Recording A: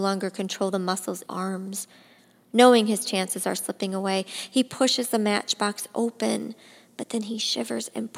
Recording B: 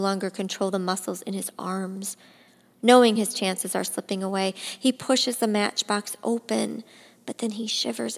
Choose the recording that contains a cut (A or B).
A